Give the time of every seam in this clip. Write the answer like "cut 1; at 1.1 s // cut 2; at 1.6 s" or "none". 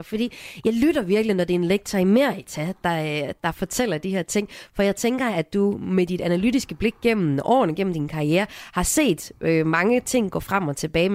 none